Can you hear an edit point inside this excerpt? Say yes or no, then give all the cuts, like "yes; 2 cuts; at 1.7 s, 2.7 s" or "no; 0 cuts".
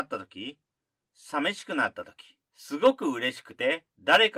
yes; 1 cut; at 2.4 s